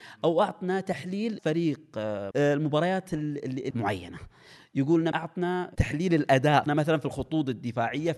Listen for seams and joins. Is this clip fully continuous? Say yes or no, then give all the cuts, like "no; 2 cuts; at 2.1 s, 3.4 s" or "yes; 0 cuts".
no; 5 cuts; at 1.4 s, 2.3 s, 3.7 s, 5.1 s, 6.7 s